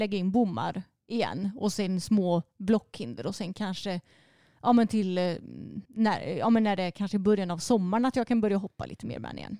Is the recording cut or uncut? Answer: cut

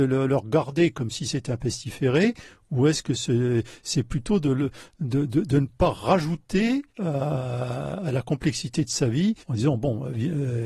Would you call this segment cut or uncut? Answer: cut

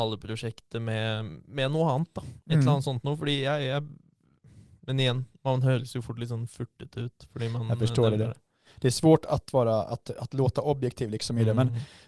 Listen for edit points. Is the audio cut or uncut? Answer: uncut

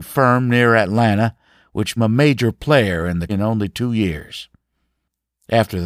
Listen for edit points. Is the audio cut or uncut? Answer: cut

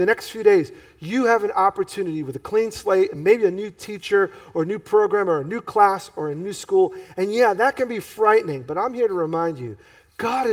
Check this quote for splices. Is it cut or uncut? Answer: uncut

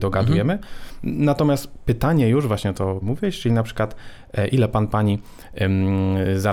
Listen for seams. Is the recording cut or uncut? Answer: cut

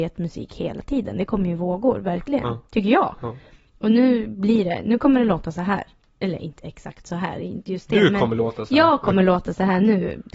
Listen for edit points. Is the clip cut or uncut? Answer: uncut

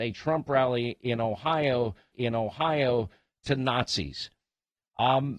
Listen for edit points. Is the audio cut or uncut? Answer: cut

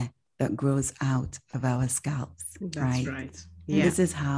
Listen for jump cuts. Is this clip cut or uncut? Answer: uncut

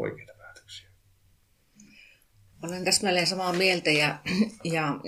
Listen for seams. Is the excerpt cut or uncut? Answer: uncut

